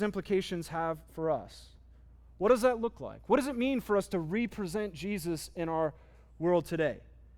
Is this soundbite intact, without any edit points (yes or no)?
yes